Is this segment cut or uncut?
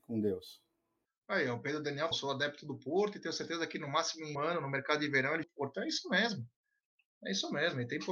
cut